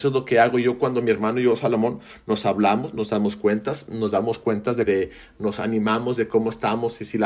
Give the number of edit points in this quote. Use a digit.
1